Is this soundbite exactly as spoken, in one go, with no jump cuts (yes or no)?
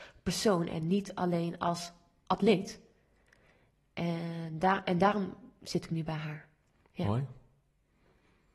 yes